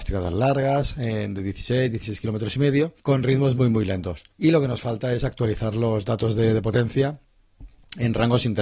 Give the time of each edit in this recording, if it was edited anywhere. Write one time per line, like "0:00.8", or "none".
0:03.0
0:04.3

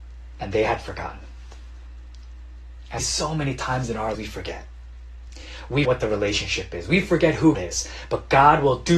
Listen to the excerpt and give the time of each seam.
0:03.0
0:04.1
0:05.8
0:07.5

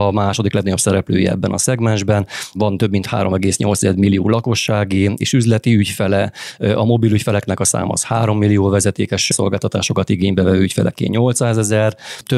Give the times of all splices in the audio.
none

